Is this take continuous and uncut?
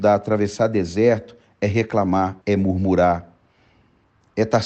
no; 1 cut; at 2.4 s

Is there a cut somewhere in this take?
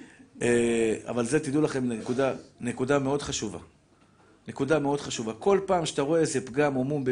no; 0 cuts

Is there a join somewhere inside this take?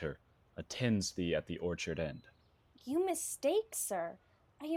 no; 0 cuts

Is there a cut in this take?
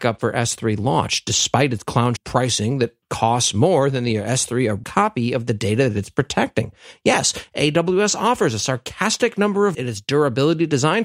yes; 3 cuts; at 2.2 s, 4.8 s, 9.7 s

